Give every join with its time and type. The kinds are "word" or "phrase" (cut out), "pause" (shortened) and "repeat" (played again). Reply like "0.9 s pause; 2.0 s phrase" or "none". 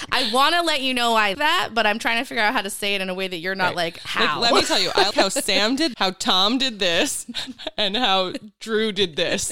1.3 s word; 5.1 s word; 5.9 s word